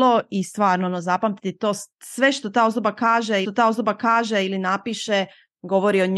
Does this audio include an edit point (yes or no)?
yes